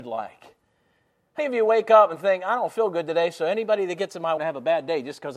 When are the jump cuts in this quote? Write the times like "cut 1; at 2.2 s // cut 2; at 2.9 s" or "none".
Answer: cut 1; at 1.4 s // cut 2; at 4.4 s